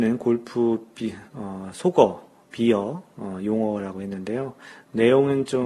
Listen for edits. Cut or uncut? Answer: cut